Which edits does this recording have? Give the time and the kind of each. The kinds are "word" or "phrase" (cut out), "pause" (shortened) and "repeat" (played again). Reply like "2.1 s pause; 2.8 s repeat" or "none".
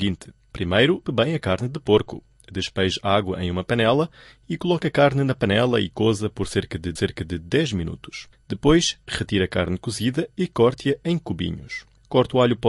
1.0 s word; 7.0 s repeat